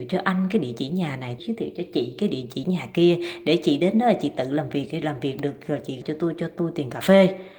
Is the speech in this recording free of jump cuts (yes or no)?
no